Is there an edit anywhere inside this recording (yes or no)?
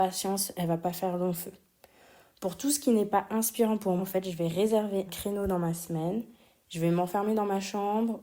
yes